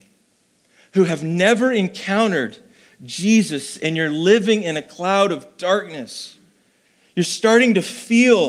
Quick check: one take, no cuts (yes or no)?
yes